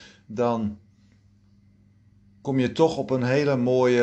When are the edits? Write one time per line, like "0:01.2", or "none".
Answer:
none

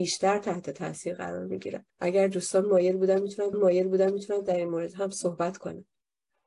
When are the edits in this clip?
0:01.9
0:03.5

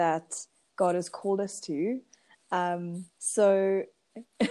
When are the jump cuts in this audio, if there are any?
0:03.1

